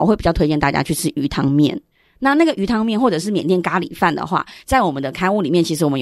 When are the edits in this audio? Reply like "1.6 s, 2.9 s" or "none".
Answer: none